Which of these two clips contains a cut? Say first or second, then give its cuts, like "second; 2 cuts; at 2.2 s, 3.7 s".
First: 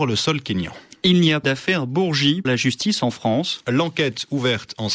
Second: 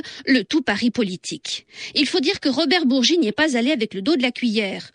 first; 2 cuts; at 1.4 s, 2.4 s